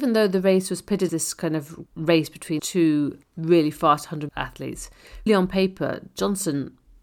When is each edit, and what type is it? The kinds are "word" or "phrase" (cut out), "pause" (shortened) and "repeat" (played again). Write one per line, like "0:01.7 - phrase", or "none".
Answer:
0:01.1 - word
0:01.9 - word
0:02.6 - word
0:03.2 - word
0:04.3 - word
0:05.3 - word